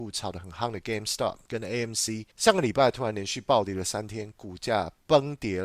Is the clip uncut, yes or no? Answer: no